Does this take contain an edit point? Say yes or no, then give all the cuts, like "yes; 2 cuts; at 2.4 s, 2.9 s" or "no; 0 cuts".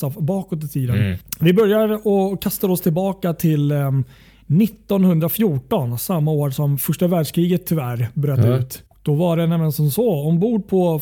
yes; 1 cut; at 8.9 s